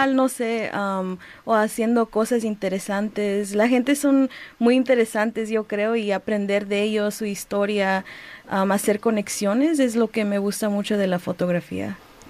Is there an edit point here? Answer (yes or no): no